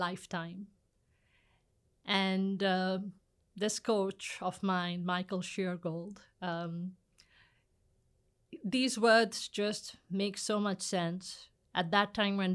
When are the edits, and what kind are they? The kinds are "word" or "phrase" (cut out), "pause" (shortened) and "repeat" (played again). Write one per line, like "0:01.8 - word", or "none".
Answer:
none